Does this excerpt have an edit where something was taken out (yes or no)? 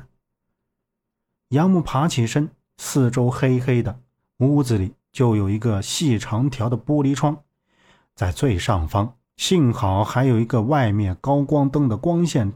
no